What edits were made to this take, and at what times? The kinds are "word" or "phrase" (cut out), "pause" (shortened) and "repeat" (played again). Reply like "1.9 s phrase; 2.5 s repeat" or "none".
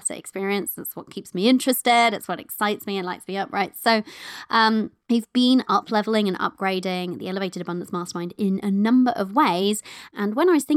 5.0 s pause